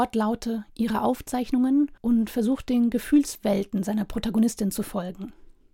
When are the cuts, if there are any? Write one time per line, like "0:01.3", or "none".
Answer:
0:02.0